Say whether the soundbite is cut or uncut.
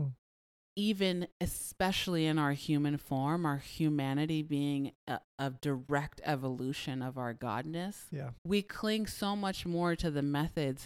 cut